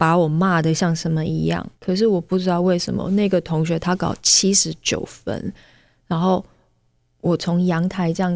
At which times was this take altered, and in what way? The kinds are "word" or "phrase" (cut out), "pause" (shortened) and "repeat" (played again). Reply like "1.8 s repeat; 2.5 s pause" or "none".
1.7 s pause